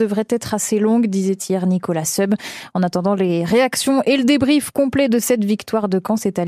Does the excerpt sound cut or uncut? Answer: uncut